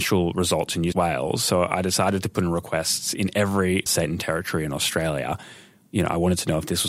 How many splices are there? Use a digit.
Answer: 2